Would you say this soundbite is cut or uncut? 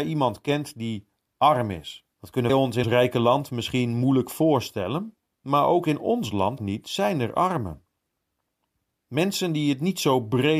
cut